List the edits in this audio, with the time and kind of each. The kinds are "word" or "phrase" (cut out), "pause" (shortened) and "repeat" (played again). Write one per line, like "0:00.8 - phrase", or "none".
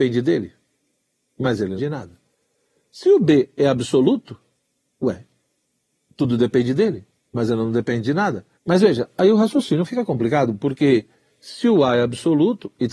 0:01.8 - phrase
0:08.5 - pause